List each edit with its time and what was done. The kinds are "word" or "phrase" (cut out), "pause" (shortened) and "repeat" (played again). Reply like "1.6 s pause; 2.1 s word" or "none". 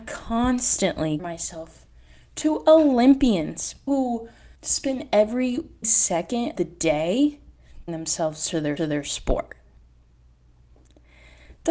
1.2 s word; 3.9 s word; 4.5 s pause; 5.8 s word; 6.6 s word; 7.9 s word; 8.8 s repeat